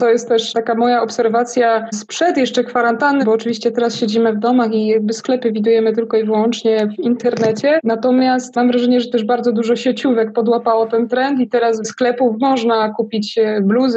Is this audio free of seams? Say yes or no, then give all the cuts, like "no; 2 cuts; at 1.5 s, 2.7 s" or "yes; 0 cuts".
no; 2 cuts; at 3.2 s, 11.8 s